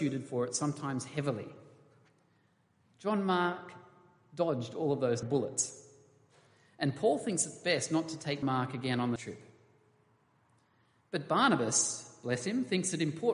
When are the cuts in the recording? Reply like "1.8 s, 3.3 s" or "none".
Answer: 5.2 s, 8.4 s, 9.2 s